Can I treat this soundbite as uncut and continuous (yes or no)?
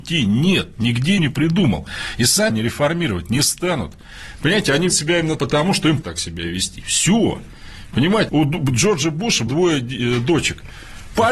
no